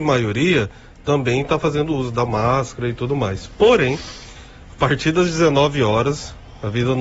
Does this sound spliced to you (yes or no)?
no